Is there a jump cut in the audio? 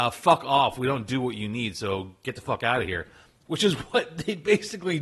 no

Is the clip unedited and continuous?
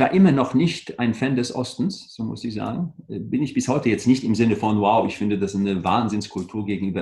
yes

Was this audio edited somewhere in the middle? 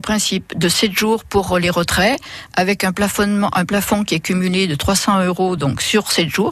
no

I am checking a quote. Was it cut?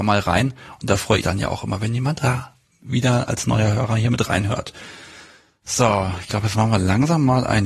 yes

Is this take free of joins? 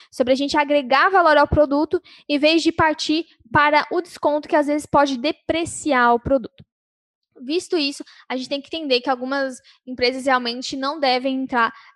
yes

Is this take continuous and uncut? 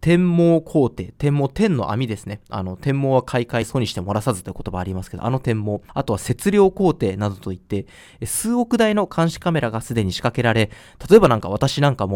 yes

